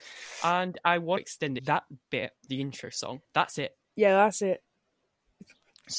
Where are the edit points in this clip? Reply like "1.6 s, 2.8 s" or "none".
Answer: 1.2 s, 1.6 s, 2.5 s, 3.2 s, 3.8 s